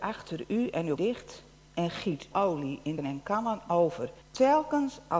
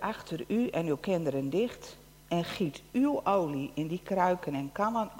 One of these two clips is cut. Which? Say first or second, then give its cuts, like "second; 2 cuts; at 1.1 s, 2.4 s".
first; 4 cuts; at 1.0 s, 2.3 s, 3.0 s, 4.2 s